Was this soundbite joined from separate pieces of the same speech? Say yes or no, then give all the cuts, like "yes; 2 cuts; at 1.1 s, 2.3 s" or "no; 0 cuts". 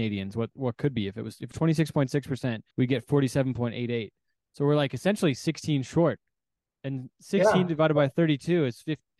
yes; 2 cuts; at 1.5 s, 2.7 s